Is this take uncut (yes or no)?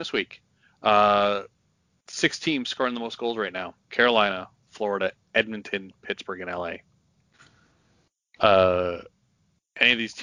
no